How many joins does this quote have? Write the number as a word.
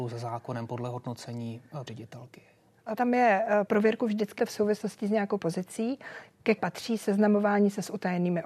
six